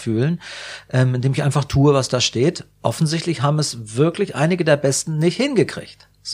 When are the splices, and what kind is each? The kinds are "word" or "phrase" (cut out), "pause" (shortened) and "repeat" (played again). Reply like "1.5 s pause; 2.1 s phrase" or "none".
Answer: none